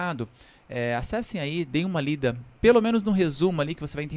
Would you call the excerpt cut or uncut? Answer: uncut